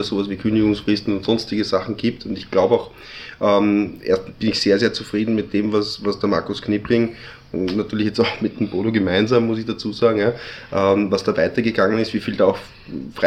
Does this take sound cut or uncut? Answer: uncut